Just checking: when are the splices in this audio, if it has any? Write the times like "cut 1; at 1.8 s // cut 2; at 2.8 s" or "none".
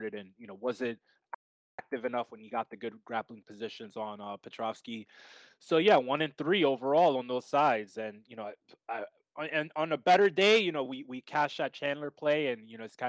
none